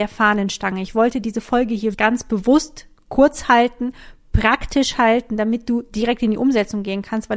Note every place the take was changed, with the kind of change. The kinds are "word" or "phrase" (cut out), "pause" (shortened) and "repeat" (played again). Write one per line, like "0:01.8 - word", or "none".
0:01.9 - word